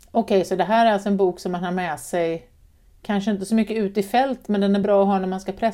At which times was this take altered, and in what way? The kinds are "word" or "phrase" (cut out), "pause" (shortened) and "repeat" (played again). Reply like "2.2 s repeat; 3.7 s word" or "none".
none